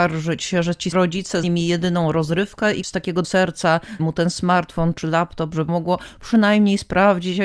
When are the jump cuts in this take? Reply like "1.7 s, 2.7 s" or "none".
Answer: 0.9 s, 1.4 s, 2.8 s, 3.2 s, 4.0 s, 5.7 s